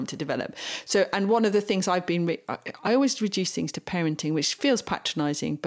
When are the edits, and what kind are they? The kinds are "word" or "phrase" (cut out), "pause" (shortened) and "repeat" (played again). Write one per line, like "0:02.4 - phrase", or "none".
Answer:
none